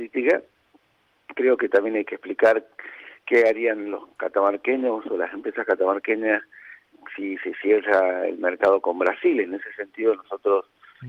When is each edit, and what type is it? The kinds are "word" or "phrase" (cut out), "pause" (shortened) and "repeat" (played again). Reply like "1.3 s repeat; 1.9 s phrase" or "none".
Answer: none